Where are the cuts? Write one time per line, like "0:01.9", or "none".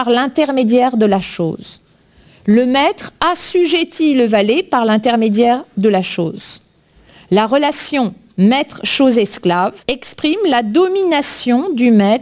0:09.8